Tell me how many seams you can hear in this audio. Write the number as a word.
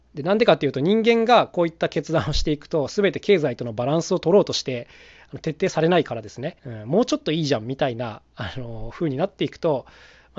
one